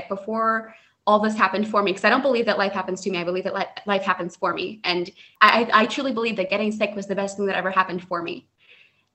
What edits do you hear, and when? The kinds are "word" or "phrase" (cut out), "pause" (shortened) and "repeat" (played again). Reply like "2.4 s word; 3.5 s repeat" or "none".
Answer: none